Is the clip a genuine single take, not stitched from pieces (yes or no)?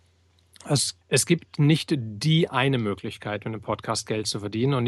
no